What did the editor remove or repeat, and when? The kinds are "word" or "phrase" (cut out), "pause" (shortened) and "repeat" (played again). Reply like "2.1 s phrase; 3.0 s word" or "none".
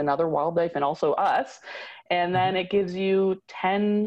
none